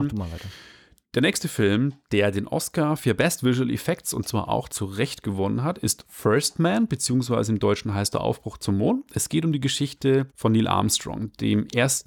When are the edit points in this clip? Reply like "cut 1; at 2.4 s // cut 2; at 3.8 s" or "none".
cut 1; at 10.3 s